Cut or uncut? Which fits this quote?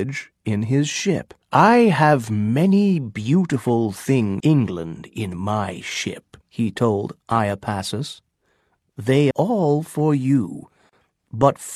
cut